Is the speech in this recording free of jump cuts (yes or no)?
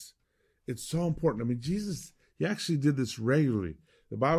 yes